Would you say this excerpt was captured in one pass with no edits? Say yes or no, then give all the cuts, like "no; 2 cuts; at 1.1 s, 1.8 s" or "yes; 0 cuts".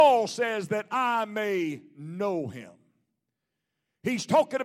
yes; 0 cuts